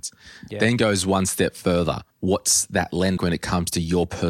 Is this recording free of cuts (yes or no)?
no